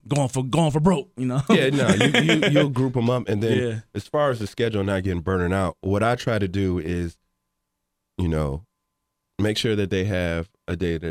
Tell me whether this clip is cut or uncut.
uncut